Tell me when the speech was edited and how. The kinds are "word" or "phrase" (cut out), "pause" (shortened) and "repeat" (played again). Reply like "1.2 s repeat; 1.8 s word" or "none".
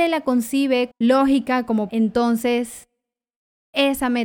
0.9 s word; 1.9 s word